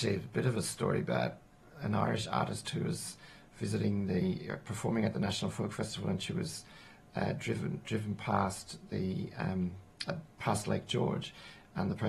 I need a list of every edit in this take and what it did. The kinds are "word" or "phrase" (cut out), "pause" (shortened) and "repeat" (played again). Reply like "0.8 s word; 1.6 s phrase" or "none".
none